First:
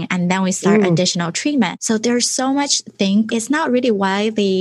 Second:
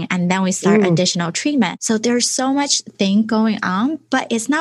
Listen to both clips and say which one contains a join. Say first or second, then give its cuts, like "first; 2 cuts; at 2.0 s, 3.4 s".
first; 1 cut; at 3.3 s